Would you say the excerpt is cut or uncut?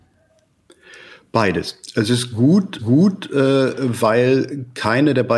cut